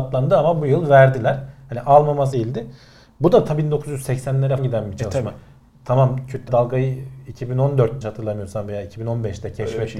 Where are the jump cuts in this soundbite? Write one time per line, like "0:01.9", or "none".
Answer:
0:02.3
0:04.6
0:06.5
0:08.0